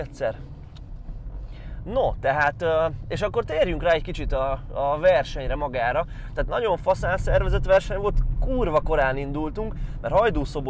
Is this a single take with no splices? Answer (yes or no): yes